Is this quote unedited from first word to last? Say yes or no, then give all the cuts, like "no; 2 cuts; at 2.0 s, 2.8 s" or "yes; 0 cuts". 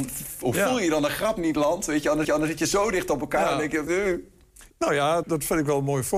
no; 4 cuts; at 2.2 s, 3.9 s, 4.7 s, 5.2 s